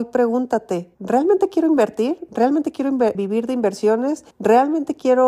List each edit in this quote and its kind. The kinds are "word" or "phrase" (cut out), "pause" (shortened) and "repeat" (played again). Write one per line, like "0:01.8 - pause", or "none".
0:00.9 - pause
0:03.1 - word
0:04.3 - pause